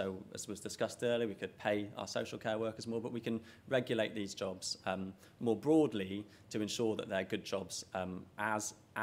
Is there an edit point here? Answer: no; 0 cuts

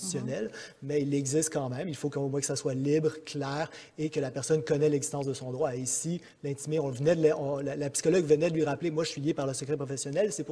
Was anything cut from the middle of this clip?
no; 0 cuts

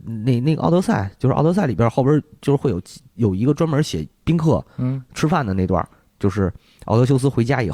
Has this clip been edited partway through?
no; 0 cuts

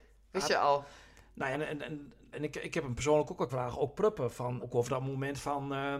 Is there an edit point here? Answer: yes; 4 cuts; at 1.5 s, 2.3 s, 3.5 s, 4.6 s

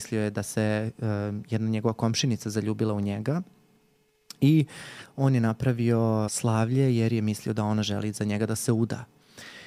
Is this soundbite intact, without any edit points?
no; 1 cut; at 6.3 s

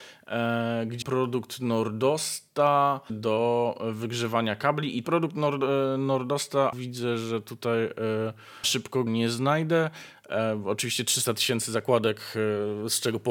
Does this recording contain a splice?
yes; 6 cuts; at 1.0 s, 3.1 s, 5.0 s, 6.7 s, 8.6 s, 9.1 s

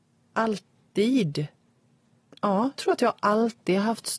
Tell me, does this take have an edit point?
yes; 1 cut; at 2.8 s

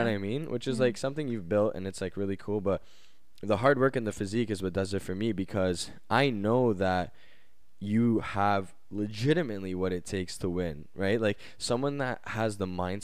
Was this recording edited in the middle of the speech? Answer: no; 0 cuts

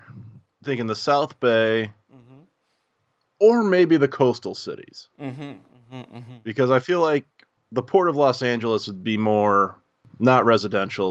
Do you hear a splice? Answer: no; 0 cuts

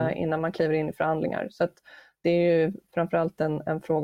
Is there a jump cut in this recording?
no; 0 cuts

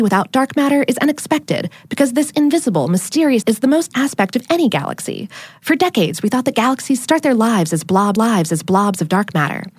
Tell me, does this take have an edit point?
yes; 3 cuts; at 3.4 s, 3.9 s, 8.2 s

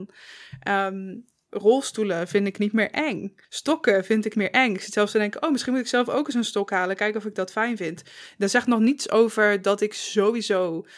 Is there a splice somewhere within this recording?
yes; 2 cuts; at 3.4 s, 4.3 s

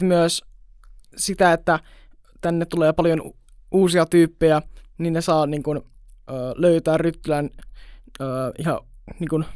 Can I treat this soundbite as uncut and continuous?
yes; 0 cuts

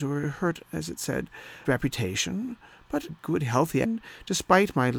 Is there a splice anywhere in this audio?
yes; 3 cuts; at 1.6 s, 3.1 s, 3.8 s

